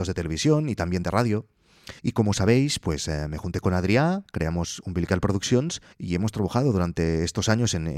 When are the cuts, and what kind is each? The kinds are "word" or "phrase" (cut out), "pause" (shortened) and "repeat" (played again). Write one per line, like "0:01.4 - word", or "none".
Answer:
0:02.0 - pause
0:05.9 - pause

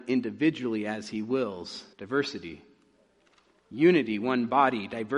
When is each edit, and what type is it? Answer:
0:01.9 - pause

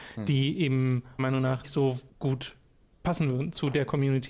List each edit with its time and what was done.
0:01.2 - word
0:01.6 - word
0:02.1 - pause

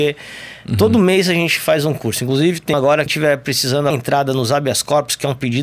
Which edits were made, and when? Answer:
0:02.7 - word
0:03.1 - word
0:03.9 - phrase

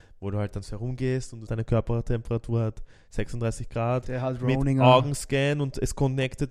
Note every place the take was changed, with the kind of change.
0:01.5 - phrase

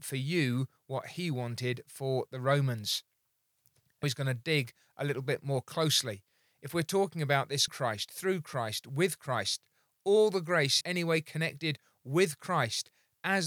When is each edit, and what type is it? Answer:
0:04.0 - word
0:07.7 - phrase
0:10.8 - word

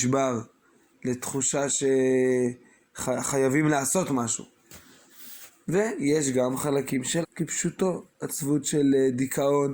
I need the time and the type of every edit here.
0:07.2 - word

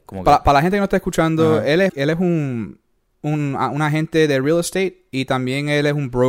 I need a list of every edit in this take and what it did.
0:01.9 - phrase

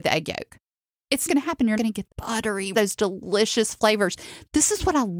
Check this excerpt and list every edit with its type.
0:01.3 - word
0:01.8 - word
0:02.1 - word
0:02.7 - word

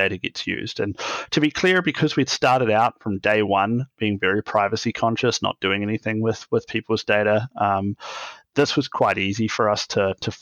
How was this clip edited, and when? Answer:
none

